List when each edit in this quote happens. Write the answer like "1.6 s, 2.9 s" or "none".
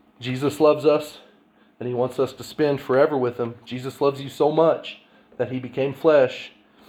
none